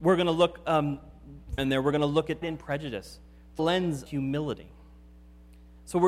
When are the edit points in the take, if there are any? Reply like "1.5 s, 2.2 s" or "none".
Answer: 1.6 s, 2.4 s, 3.6 s, 4.1 s